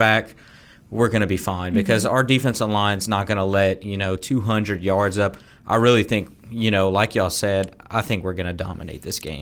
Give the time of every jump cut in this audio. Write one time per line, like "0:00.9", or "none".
none